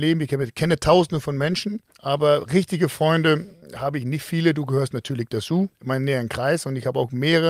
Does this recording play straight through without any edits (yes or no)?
no